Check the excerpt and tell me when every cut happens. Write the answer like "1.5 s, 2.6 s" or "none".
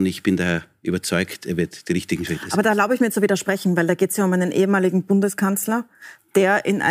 none